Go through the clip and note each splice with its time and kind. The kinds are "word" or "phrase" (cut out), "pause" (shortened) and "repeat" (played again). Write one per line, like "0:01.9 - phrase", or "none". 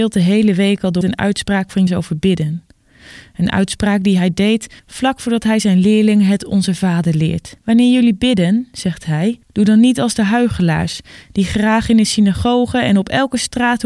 0:01.0 - phrase
0:01.9 - word
0:04.8 - pause
0:07.6 - pause
0:09.4 - pause

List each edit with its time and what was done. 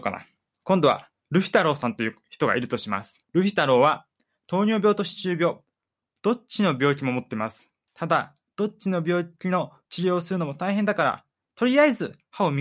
0:03.2 - pause
0:07.9 - pause

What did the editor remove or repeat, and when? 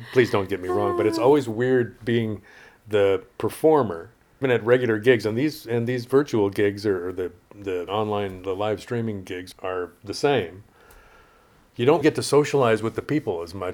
0:04.4 - word
0:07.9 - word
0:09.5 - word
0:12.0 - word

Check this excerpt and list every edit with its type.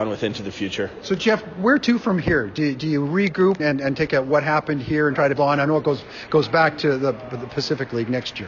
0:03.6 - word
0:04.1 - phrase
0:05.4 - word

